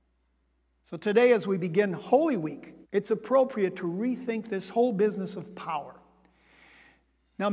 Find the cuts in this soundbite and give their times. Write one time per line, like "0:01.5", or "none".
0:02.8